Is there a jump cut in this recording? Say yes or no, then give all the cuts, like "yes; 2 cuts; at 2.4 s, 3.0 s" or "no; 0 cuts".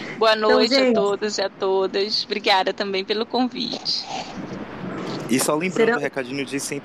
no; 0 cuts